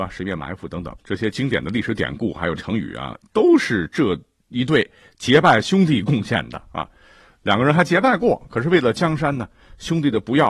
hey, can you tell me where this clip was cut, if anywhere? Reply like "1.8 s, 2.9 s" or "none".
none